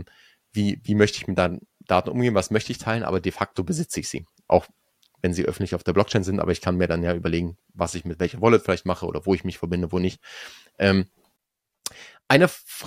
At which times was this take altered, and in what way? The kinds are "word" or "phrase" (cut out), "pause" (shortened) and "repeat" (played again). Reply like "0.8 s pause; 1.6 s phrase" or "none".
none